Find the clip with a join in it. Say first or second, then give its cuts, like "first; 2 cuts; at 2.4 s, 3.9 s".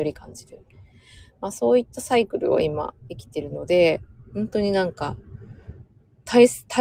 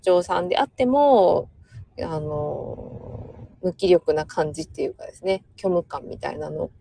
second; 1 cut; at 3.5 s